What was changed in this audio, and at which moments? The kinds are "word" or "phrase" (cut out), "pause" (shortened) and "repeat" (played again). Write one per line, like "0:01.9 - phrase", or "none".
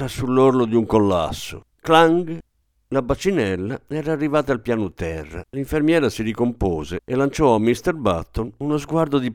0:01.7 - pause
0:05.5 - pause
0:07.0 - pause